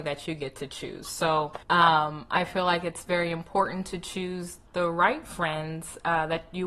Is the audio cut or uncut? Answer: cut